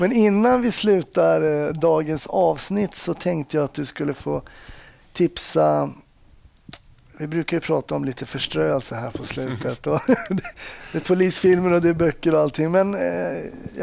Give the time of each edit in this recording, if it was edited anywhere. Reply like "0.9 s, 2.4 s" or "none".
none